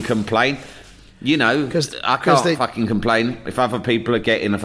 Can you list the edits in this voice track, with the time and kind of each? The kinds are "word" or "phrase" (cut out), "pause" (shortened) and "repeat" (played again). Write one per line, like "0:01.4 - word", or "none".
none